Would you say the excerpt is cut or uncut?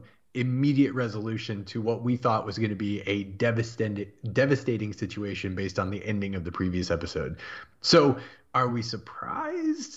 uncut